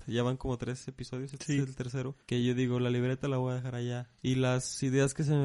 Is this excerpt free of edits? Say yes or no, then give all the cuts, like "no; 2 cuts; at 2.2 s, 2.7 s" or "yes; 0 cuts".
no; 2 cuts; at 2.2 s, 4.2 s